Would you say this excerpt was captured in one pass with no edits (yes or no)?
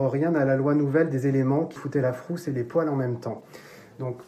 no